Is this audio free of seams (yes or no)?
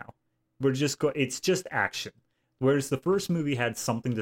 yes